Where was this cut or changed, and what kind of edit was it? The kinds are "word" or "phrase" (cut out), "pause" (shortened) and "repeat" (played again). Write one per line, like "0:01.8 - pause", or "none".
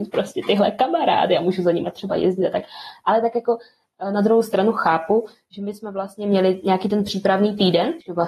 none